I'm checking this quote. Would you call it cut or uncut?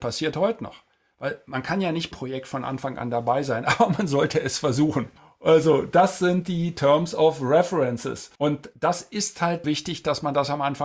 cut